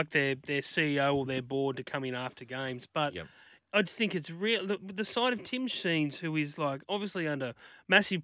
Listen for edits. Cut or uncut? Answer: cut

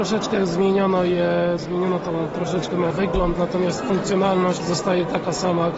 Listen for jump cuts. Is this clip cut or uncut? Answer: cut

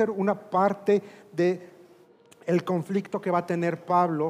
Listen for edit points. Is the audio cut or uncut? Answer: uncut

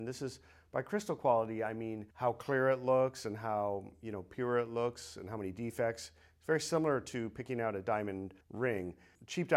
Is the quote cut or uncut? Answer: cut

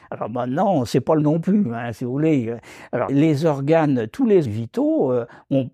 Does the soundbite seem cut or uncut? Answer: cut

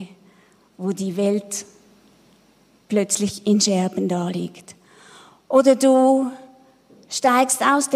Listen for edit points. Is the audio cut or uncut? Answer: uncut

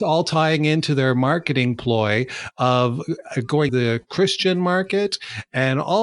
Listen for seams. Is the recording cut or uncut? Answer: cut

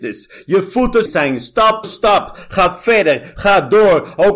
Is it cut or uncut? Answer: cut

